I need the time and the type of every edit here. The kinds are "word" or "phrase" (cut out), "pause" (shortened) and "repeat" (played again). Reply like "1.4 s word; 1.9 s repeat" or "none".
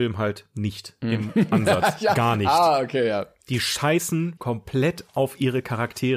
4.4 s word